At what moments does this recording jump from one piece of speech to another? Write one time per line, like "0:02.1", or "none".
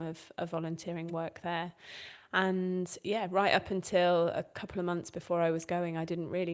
none